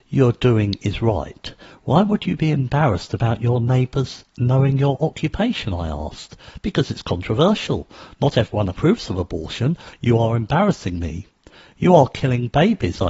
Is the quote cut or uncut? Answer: uncut